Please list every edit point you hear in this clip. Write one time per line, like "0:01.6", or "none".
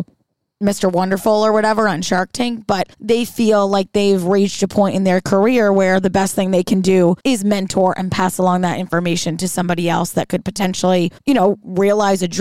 0:02.9
0:07.2
0:11.2